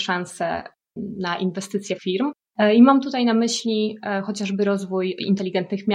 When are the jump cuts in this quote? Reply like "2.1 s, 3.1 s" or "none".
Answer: 2.0 s